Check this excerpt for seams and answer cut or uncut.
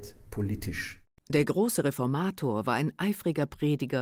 uncut